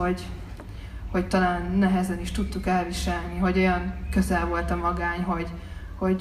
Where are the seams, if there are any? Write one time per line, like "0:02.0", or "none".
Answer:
none